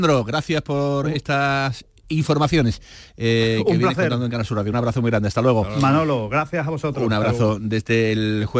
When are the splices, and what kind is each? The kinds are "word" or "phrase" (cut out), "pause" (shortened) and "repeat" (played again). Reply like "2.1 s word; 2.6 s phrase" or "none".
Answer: none